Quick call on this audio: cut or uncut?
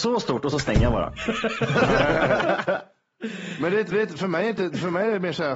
cut